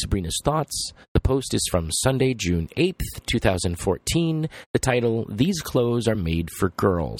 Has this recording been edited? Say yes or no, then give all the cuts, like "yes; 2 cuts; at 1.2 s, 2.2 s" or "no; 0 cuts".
no; 0 cuts